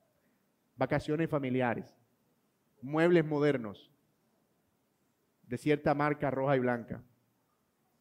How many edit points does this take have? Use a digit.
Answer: 0